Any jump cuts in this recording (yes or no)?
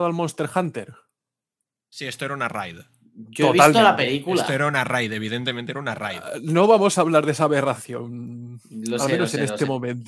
no